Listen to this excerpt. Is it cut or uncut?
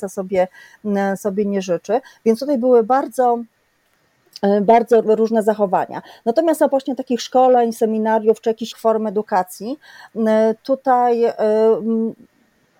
cut